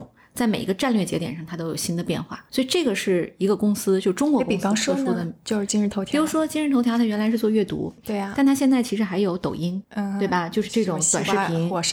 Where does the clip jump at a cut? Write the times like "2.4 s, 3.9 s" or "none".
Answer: none